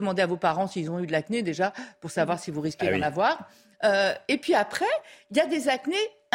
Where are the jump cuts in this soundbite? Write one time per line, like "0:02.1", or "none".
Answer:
none